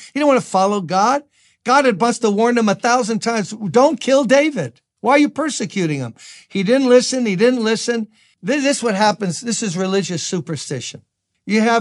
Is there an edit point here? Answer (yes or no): no